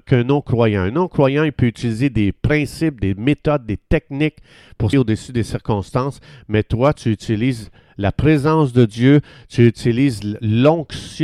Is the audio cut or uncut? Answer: cut